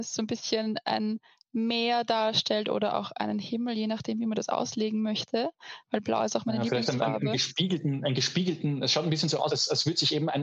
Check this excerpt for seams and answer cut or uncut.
cut